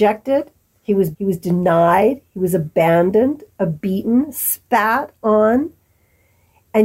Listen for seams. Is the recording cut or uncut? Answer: cut